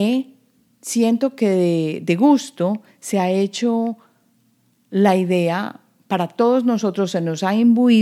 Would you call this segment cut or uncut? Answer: uncut